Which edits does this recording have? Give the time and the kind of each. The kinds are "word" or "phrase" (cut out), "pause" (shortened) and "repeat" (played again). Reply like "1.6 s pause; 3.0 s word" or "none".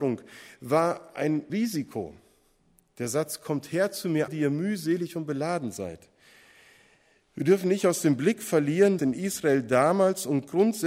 1.5 s word; 4.3 s word; 9.0 s word